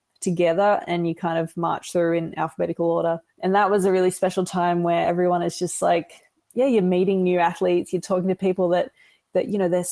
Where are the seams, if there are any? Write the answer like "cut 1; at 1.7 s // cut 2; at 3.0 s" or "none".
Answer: cut 1; at 3.3 s